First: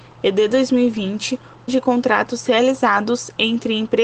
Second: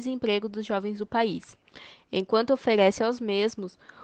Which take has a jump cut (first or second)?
first